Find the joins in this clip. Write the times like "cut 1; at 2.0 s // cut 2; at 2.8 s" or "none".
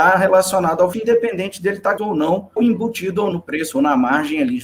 cut 1; at 0.9 s // cut 2; at 2.0 s // cut 3; at 2.6 s // cut 4; at 3.3 s